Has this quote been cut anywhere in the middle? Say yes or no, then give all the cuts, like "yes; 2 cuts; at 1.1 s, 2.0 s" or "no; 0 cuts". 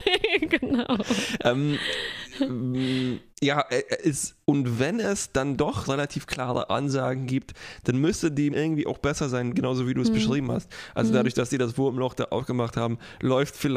yes; 4 cuts; at 3.3 s, 4.4 s, 5.8 s, 8.5 s